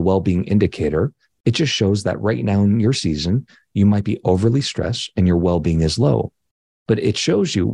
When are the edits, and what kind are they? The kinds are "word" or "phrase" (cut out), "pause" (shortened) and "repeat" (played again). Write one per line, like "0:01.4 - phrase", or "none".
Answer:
none